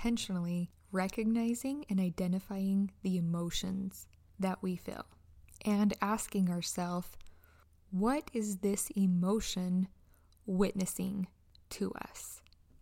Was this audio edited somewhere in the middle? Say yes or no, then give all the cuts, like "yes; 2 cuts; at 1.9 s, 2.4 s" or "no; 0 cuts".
no; 0 cuts